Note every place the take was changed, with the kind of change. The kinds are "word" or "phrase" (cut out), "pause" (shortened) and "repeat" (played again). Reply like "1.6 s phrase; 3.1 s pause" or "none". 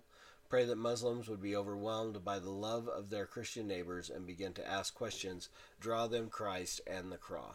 5.8 s word; 6.3 s word